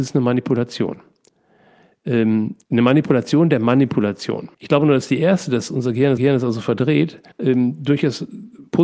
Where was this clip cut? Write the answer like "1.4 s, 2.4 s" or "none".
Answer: 2.6 s, 4.5 s, 6.2 s, 7.3 s